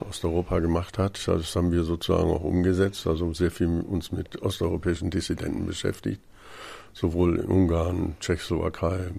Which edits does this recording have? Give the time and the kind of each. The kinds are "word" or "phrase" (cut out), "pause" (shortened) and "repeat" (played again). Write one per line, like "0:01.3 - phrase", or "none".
none